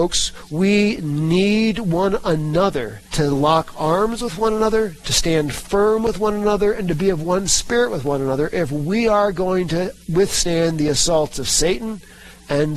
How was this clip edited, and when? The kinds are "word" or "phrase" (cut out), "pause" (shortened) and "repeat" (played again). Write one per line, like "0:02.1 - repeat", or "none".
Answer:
0:03.1 - pause
0:10.0 - pause